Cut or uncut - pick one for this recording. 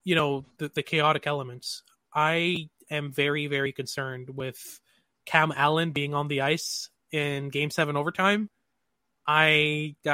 uncut